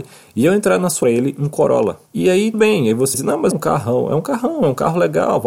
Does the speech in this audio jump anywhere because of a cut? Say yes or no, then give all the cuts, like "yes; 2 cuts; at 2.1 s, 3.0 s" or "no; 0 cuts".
yes; 5 cuts; at 1.0 s, 2.1 s, 2.5 s, 3.1 s, 3.5 s